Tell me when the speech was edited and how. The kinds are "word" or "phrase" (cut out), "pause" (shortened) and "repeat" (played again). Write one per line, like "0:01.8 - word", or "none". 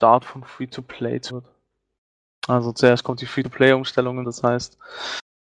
0:01.3 - word
0:04.2 - word